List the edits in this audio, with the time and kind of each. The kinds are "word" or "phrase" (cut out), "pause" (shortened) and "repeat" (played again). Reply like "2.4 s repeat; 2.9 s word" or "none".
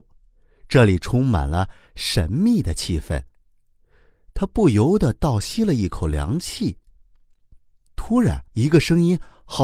8.5 s pause